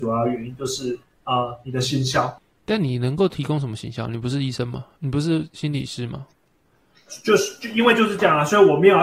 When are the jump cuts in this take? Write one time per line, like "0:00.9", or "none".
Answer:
none